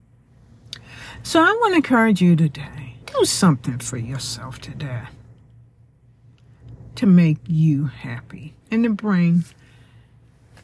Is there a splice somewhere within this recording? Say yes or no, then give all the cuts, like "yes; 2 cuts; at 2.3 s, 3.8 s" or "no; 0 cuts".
yes; 2 cuts; at 3.0 s, 8.6 s